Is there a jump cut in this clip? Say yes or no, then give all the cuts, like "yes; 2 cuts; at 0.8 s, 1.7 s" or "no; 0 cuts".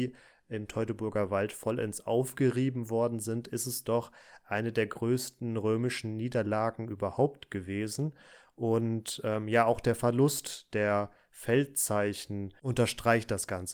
no; 0 cuts